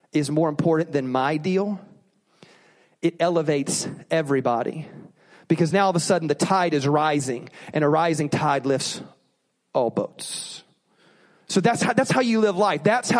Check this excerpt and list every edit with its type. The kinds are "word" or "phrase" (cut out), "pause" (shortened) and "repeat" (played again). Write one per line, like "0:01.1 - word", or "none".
none